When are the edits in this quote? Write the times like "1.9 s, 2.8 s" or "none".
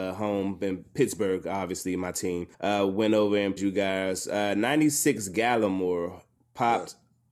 2.5 s, 3.6 s, 6.4 s